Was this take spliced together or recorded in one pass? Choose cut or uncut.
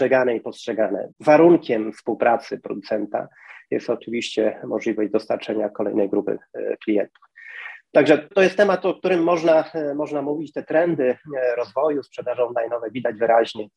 cut